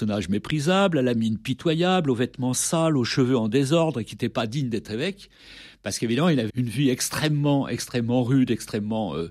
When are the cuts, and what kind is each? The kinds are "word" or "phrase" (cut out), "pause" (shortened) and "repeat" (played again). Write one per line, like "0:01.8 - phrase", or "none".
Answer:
0:06.5 - word